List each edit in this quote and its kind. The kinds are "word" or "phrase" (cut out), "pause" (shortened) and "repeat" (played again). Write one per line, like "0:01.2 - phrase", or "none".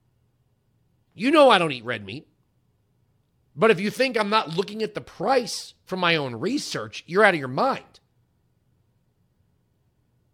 none